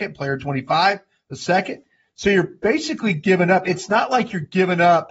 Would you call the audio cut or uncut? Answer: uncut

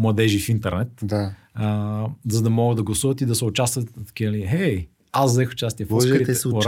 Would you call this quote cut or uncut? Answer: uncut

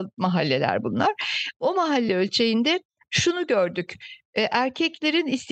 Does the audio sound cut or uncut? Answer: uncut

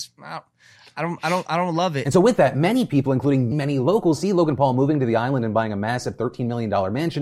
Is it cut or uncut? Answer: cut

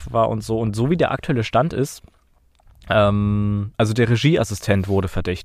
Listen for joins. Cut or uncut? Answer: cut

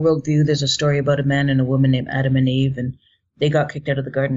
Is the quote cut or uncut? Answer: uncut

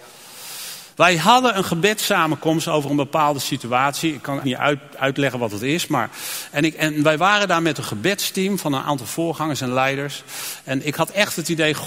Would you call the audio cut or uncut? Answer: cut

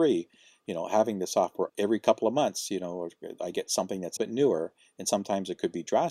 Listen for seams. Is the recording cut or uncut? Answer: cut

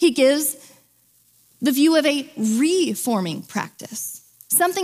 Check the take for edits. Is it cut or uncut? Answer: uncut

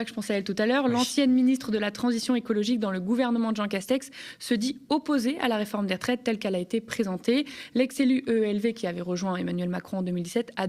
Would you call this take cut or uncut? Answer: uncut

